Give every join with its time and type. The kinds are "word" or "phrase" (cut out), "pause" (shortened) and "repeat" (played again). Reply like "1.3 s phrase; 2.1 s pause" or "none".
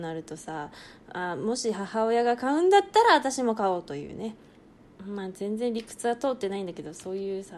4.8 s pause